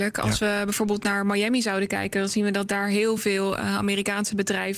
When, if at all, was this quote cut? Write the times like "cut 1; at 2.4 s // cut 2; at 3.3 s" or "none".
none